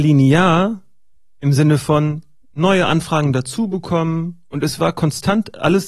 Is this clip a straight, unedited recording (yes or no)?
yes